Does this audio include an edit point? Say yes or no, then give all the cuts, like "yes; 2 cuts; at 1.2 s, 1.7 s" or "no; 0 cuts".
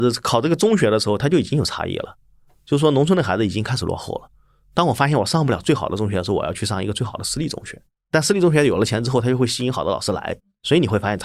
no; 0 cuts